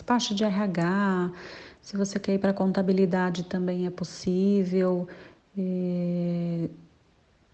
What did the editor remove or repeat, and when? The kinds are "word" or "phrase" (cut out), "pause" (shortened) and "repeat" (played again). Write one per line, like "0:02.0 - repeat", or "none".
none